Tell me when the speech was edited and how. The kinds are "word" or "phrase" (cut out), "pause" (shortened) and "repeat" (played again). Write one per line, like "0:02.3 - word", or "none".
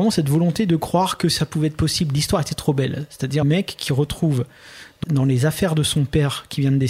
0:03.4 - word
0:05.0 - word